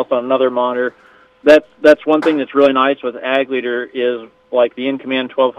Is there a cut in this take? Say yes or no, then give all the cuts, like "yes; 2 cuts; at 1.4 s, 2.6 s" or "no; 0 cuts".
no; 0 cuts